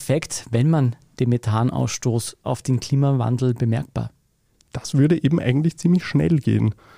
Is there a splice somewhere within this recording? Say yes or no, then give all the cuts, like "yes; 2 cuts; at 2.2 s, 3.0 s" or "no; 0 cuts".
yes; 1 cut; at 2.4 s